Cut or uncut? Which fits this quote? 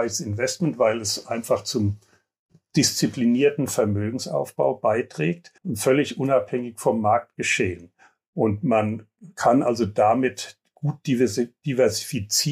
cut